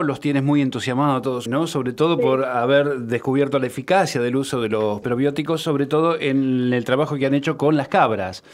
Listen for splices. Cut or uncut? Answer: cut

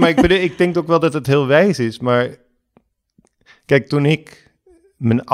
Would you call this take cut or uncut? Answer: uncut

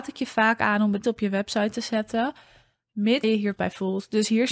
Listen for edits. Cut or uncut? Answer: cut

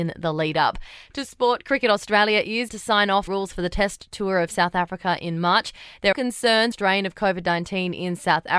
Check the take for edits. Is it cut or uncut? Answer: cut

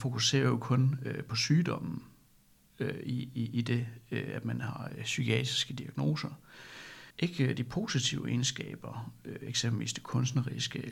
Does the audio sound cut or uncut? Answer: cut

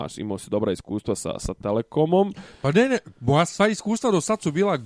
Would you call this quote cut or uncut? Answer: uncut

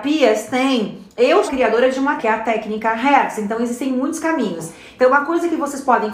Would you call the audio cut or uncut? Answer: cut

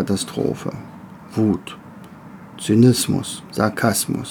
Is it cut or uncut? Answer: cut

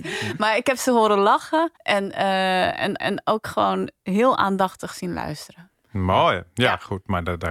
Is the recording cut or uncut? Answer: cut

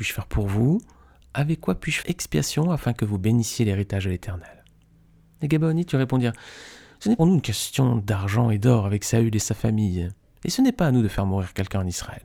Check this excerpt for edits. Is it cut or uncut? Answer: cut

